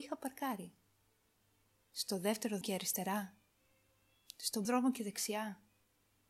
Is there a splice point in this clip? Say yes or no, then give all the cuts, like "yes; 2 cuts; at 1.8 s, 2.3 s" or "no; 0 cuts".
yes; 2 cuts; at 2.6 s, 4.6 s